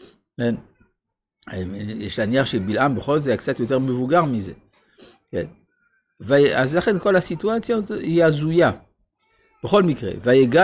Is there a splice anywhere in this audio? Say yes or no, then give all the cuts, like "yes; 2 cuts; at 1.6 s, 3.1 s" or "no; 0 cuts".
no; 0 cuts